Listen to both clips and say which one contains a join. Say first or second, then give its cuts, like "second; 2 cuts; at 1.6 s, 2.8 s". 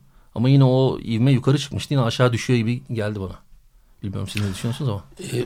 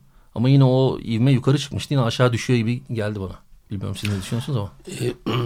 second; 1 cut; at 3.6 s